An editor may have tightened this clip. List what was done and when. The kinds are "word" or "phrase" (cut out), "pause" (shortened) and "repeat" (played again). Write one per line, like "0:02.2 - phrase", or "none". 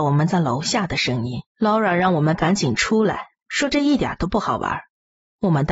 0:01.5 - pause